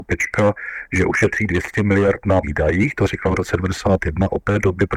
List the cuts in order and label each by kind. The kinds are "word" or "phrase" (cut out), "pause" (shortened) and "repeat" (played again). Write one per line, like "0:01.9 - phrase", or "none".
0:02.4 - word

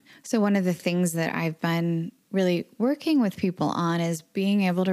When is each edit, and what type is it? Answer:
none

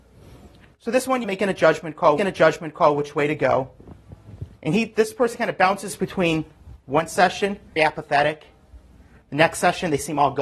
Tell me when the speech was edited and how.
0:01.2 - phrase
0:02.2 - repeat
0:04.6 - pause
0:07.8 - word

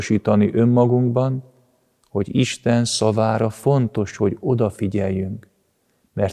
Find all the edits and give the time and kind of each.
none

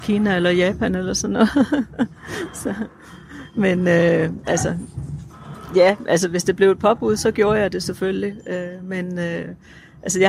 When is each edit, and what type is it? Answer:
none

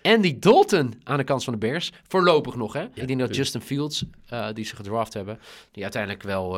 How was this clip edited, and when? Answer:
0:03.0 - phrase

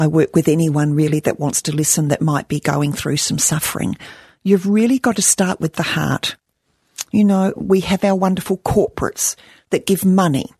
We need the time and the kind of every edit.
none

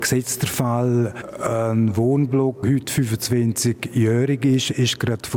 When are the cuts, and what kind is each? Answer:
0:02.6 - word

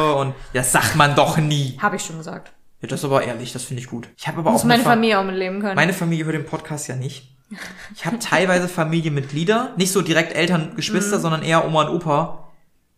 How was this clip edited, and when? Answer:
0:04.1 - pause

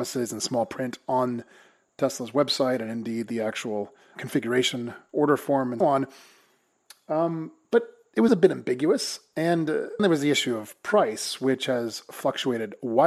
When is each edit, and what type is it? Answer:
0:04.1 - word
0:05.8 - word
0:08.3 - word
0:10.0 - word

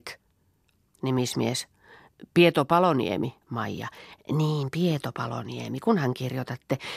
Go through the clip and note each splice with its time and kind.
0:03.4 - pause

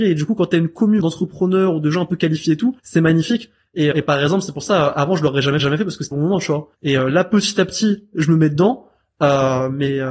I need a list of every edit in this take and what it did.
0:01.0 - word
0:02.8 - pause
0:03.9 - word
0:05.6 - repeat
0:06.1 - phrase
0:06.7 - pause

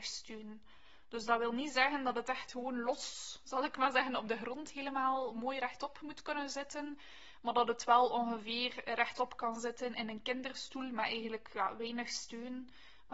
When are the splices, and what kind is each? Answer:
0:01.3 - word

